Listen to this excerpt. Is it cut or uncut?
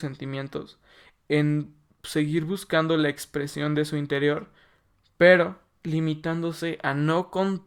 uncut